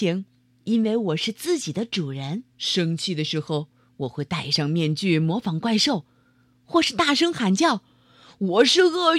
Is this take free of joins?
no; 1 cut; at 2.5 s

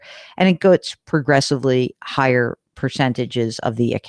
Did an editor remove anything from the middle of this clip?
yes; 1 cut; at 2.7 s

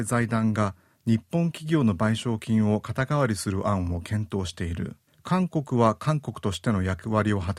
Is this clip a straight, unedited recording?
no; 1 cut; at 5.1 s

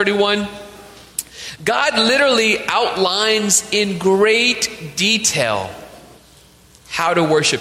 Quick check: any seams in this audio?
no; 0 cuts

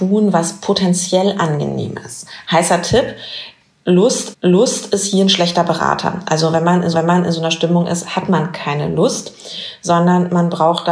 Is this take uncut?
no; 2 cuts; at 4.3 s, 6.9 s

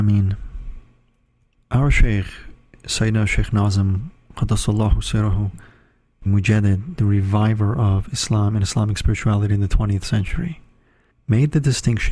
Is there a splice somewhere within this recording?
yes; 1 cut; at 6.3 s

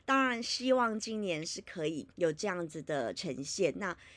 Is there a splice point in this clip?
yes; 1 cut; at 2.1 s

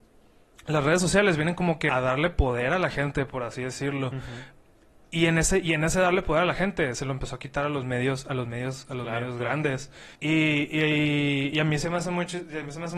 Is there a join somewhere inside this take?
yes; 2 cuts; at 1.9 s, 10.2 s

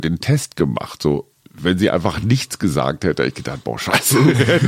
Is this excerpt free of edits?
yes; 0 cuts

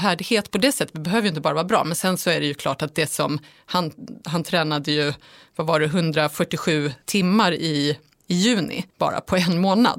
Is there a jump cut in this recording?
yes; 2 cuts; at 7.0 s, 8.9 s

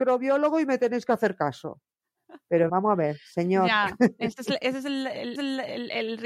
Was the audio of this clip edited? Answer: yes; 2 cuts; at 2.7 s, 5.4 s

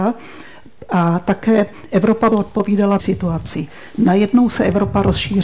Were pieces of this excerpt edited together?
yes; 2 cuts; at 2.3 s, 3.0 s

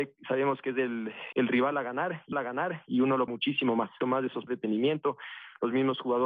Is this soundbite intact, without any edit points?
no; 5 cuts; at 1.3 s, 2.3 s, 3.3 s, 4.0 s, 4.5 s

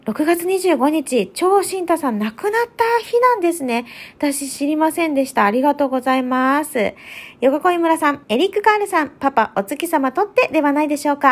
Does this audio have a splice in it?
yes; 1 cut; at 8.2 s

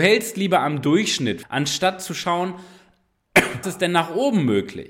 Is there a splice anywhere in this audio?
yes; 2 cuts; at 1.4 s, 3.6 s

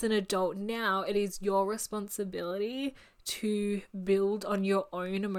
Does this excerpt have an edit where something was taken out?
no; 0 cuts

